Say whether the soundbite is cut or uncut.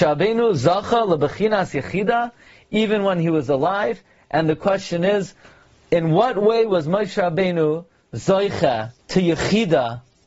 cut